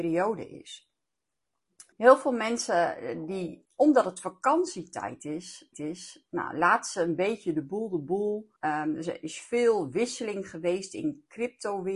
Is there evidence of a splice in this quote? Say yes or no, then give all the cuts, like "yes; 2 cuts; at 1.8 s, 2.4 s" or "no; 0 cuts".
yes; 4 cuts; at 1.9 s, 3.6 s, 5.7 s, 8.6 s